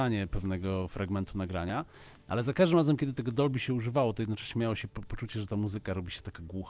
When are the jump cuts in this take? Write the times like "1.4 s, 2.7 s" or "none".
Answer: none

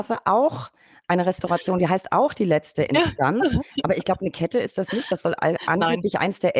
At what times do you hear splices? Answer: none

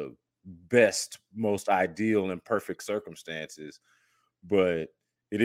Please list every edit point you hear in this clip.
none

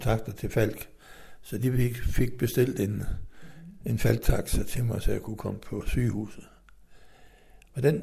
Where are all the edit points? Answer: none

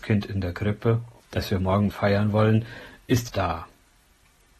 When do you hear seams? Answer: 1.2 s, 1.9 s, 3.3 s

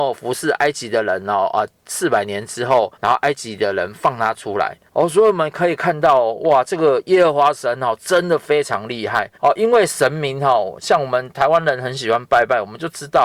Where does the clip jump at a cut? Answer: 2.9 s, 4.9 s, 9.3 s

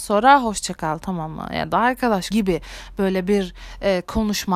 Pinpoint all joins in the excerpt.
2.3 s

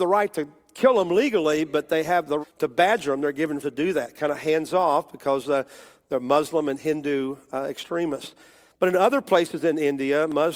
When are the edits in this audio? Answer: 2.4 s, 3.6 s

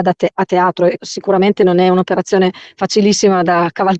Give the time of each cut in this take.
1.0 s

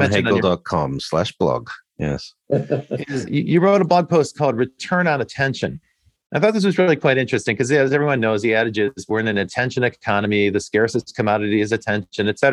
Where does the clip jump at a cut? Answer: 3.3 s

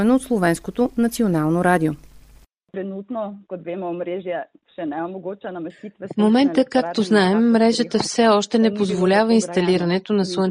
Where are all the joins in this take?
none

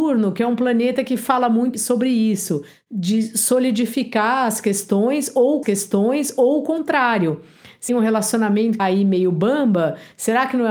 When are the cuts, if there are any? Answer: 1.7 s, 5.6 s, 7.9 s, 8.8 s

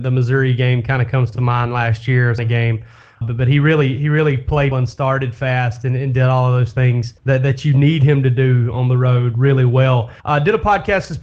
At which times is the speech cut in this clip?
2.4 s, 3.2 s, 4.7 s, 7.2 s, 10.2 s

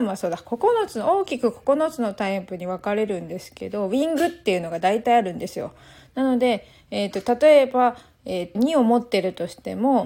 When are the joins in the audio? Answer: 8.5 s

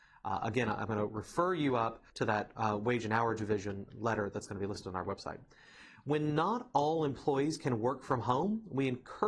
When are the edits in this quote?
2.1 s

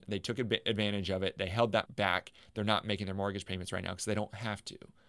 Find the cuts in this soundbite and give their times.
1.9 s

